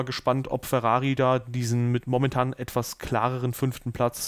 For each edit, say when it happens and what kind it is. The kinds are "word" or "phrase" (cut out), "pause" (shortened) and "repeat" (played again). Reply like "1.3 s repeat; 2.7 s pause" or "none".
none